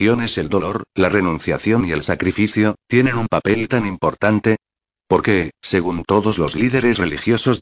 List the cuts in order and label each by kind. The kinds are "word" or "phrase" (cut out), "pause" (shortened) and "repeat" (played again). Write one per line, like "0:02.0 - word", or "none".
none